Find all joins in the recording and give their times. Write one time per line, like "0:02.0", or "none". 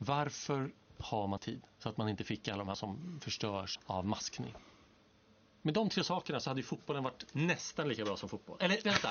0:01.4
0:02.7
0:03.8